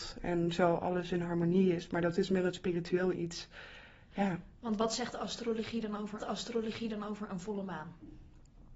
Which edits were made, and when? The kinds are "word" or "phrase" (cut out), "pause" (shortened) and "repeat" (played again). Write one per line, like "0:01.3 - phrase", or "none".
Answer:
0:03.1 - phrase
0:06.2 - repeat